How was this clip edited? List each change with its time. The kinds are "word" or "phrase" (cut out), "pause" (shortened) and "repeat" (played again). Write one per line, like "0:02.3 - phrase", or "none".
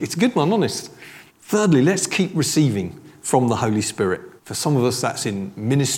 0:01.3 - pause
0:04.4 - pause